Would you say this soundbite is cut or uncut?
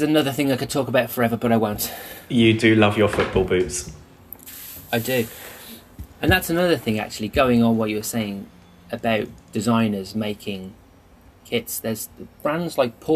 uncut